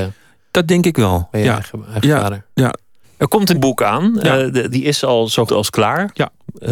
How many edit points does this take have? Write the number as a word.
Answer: four